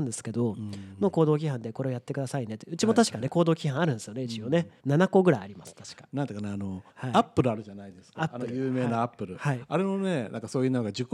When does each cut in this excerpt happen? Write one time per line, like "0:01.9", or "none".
0:04.8
0:06.9